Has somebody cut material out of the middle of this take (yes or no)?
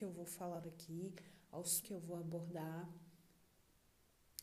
yes